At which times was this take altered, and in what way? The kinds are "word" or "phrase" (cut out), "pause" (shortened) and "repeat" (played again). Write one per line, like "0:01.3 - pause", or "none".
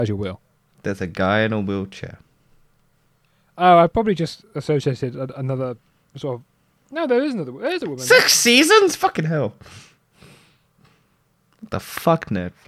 none